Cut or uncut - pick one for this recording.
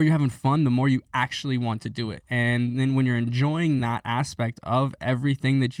uncut